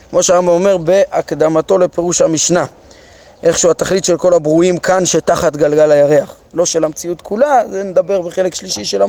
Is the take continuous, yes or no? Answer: yes